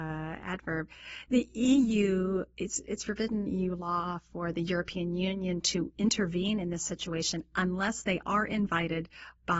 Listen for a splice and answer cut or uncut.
cut